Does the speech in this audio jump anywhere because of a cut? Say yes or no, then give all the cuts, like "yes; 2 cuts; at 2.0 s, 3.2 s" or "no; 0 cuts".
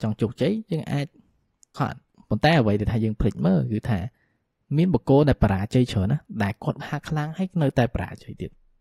yes; 2 cuts; at 1.7 s, 6.8 s